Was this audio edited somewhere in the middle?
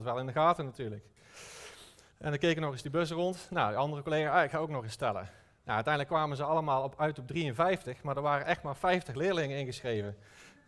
no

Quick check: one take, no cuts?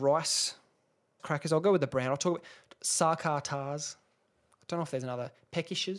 no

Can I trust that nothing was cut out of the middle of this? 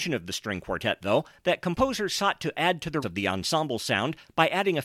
no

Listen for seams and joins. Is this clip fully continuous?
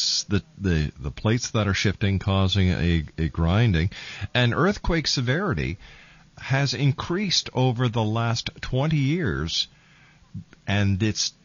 yes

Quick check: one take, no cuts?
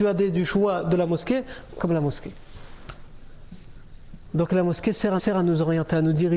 no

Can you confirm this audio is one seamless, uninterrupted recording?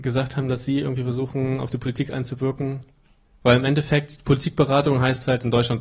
yes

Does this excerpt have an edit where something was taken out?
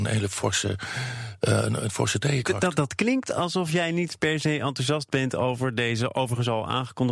no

